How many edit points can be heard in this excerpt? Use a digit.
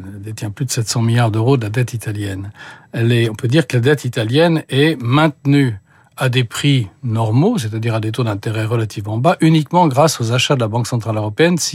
0